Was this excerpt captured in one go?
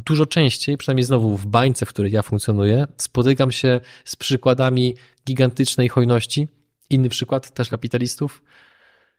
no; 1 cut; at 7.7 s

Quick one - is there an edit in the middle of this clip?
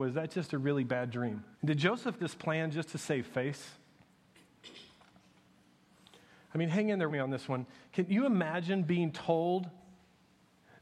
yes; 3 cuts; at 1.5 s, 2.2 s, 7.1 s

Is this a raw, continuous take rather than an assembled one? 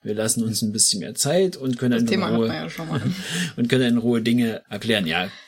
yes; 0 cuts

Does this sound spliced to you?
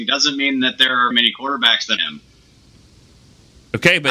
yes; 2 cuts; at 1.1 s, 2.0 s

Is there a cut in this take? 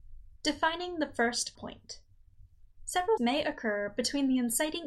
yes; 2 cuts; at 1.6 s, 3.2 s

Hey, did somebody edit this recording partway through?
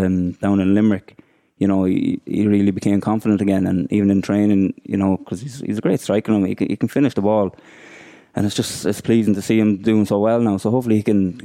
no; 0 cuts

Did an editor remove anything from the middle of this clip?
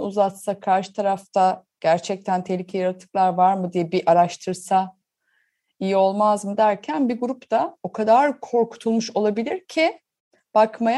no; 0 cuts

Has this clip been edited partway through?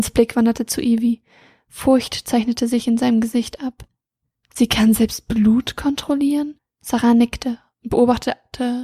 yes; 1 cut; at 6.6 s

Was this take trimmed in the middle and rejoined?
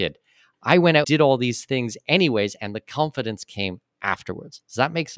yes; 1 cut; at 1.0 s

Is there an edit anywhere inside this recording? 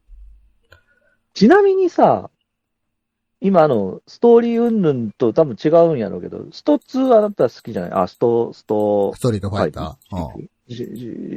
no; 0 cuts

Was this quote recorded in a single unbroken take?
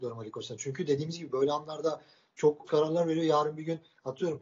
no; 1 cut; at 2.7 s

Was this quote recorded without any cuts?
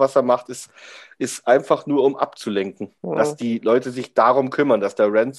no; 1 cut; at 3.0 s

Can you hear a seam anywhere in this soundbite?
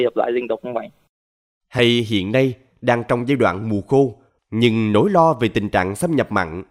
no; 0 cuts

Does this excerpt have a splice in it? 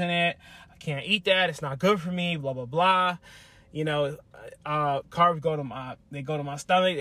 no; 0 cuts

